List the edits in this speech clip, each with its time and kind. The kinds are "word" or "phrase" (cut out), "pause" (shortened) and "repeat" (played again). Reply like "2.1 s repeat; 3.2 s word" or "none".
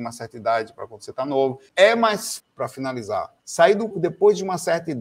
1.7 s pause; 2.4 s word; 3.4 s pause; 3.9 s word